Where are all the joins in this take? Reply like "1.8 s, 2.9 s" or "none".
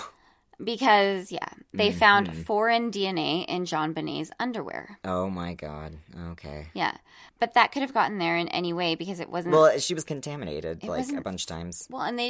7.3 s